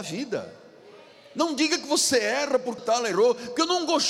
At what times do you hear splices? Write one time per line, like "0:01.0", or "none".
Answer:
0:02.8